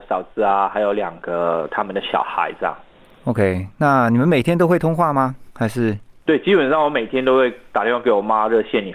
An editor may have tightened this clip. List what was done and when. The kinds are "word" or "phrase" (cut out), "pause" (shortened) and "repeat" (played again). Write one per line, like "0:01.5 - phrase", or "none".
none